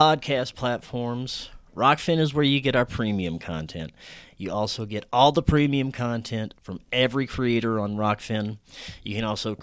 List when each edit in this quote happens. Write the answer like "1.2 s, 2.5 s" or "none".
none

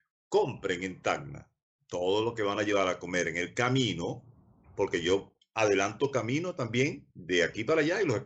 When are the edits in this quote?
7.1 s

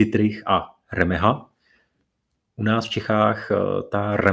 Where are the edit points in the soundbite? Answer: none

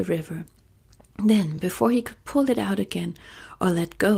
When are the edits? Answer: none

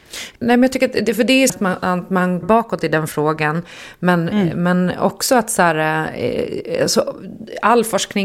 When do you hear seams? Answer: 1.5 s, 2.4 s

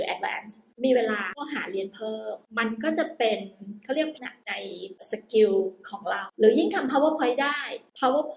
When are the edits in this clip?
4.2 s

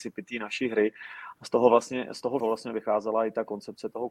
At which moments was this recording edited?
2.4 s

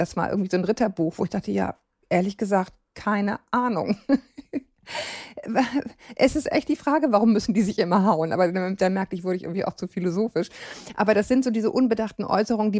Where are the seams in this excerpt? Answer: none

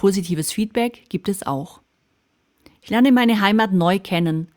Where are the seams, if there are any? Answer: none

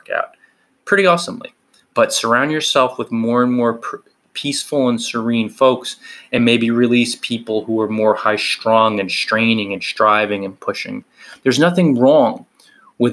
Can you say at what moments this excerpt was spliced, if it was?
none

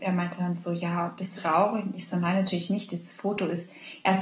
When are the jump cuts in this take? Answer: 1.4 s

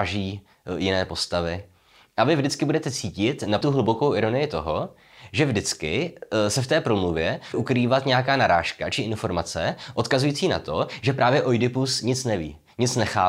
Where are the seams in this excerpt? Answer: 3.6 s, 7.5 s

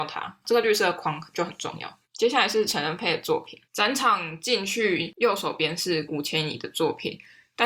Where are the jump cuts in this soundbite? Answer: 2.0 s, 3.6 s

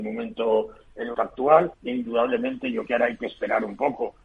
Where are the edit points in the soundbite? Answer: 1.1 s, 1.7 s, 2.9 s

